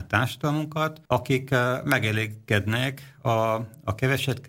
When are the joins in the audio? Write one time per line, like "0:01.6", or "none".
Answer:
0:01.1